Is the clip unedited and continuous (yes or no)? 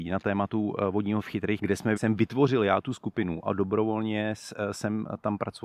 no